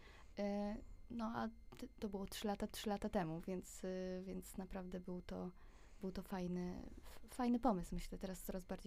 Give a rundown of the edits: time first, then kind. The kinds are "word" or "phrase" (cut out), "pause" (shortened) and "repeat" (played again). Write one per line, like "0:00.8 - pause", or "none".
0:02.7 - repeat